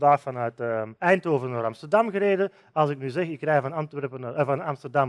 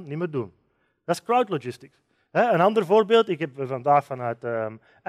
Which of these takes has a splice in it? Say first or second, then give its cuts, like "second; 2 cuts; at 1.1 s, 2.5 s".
first; 1 cut; at 1.0 s